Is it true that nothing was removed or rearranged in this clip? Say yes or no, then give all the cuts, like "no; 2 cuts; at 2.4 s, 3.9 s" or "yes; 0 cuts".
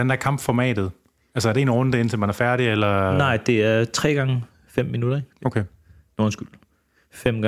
yes; 0 cuts